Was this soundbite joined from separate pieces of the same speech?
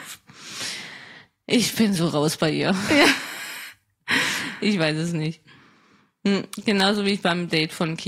no; 0 cuts

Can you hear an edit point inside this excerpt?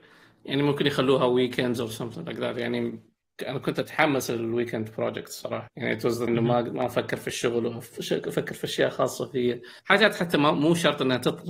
yes; 3 cuts; at 5.7 s, 6.3 s, 9.8 s

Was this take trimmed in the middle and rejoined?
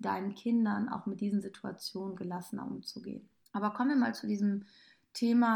yes; 1 cut; at 3.4 s

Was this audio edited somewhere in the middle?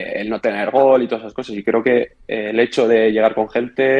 no; 0 cuts

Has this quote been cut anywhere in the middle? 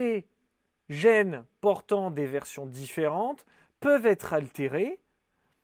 no; 0 cuts

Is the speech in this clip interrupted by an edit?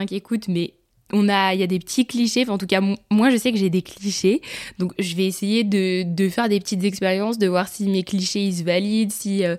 no; 0 cuts

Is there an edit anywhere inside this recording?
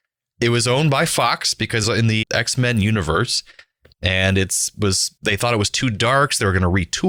yes; 2 cuts; at 1.8 s, 2.2 s

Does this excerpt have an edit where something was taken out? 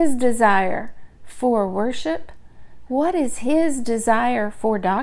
no; 0 cuts

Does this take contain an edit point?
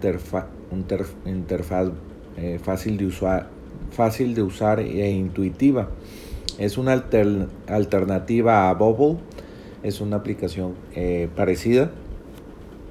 no; 0 cuts

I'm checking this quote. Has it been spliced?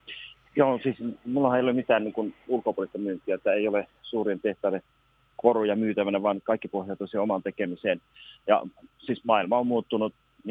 no; 0 cuts

